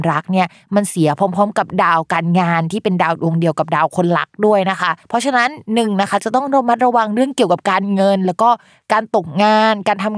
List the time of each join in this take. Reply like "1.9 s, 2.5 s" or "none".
5.0 s